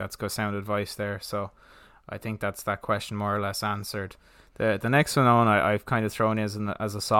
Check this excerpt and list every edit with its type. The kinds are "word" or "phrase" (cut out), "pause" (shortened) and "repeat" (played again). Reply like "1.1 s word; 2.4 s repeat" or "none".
none